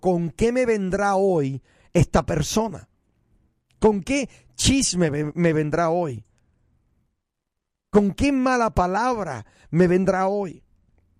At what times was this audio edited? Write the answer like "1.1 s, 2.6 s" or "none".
none